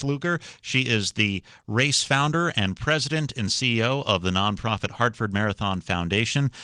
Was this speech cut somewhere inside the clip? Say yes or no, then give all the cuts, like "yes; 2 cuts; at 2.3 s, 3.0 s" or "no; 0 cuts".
no; 0 cuts